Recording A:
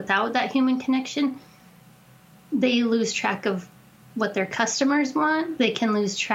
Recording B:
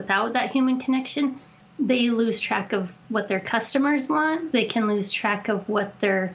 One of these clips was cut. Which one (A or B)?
B